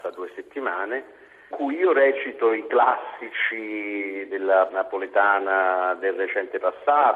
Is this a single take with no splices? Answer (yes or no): no